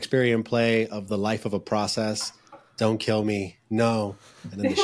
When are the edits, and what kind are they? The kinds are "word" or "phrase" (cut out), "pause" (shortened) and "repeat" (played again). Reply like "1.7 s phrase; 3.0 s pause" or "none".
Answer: none